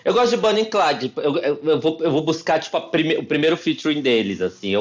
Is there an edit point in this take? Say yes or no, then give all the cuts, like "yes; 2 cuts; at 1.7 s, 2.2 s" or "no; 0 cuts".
no; 0 cuts